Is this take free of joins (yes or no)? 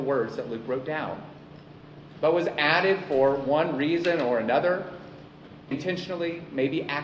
no